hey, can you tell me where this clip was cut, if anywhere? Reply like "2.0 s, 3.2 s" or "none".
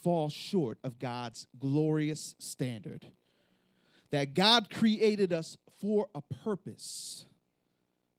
none